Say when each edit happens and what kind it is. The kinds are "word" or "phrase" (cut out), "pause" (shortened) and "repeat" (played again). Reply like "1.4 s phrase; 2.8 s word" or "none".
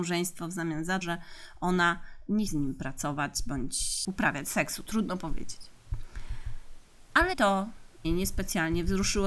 1.0 s word; 2.5 s phrase; 7.3 s word; 8.0 s word